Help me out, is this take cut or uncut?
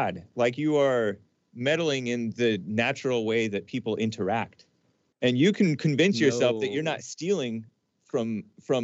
uncut